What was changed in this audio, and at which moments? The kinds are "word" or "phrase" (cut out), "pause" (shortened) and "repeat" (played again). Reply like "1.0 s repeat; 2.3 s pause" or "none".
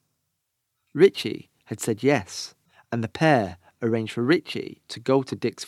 2.7 s pause